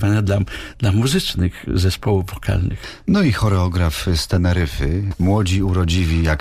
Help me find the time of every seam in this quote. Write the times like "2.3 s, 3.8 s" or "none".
none